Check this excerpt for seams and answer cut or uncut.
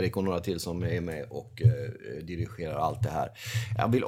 uncut